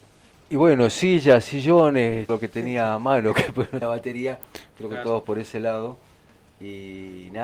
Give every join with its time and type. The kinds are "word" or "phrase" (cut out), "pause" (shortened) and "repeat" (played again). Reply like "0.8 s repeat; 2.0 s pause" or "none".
2.3 s word; 3.8 s word; 5.2 s word